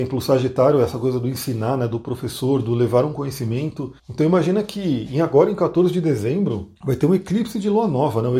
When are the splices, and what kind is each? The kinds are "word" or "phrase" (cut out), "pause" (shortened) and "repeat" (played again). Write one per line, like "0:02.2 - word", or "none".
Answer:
0:04.0 - pause
0:06.8 - pause